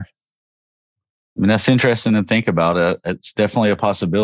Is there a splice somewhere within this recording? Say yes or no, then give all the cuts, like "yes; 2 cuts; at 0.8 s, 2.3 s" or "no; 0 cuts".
no; 0 cuts